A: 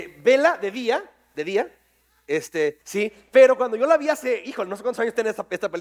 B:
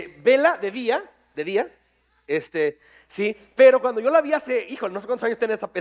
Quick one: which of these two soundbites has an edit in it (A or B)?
A